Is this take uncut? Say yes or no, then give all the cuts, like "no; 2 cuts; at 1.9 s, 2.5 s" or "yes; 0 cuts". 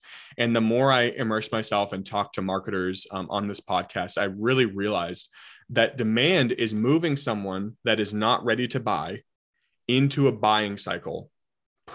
yes; 0 cuts